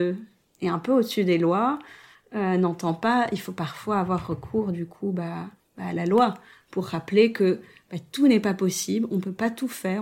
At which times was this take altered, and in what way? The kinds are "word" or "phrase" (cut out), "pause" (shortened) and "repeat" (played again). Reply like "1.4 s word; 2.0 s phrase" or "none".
5.6 s pause